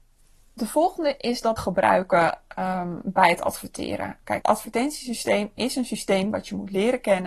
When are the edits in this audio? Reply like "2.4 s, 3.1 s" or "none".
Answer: 1.6 s, 4.4 s